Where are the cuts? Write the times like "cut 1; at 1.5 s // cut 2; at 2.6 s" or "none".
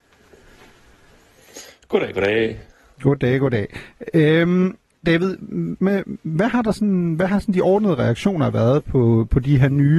cut 1; at 5.8 s